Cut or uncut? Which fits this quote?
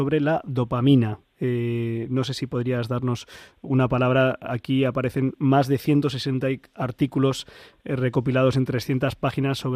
uncut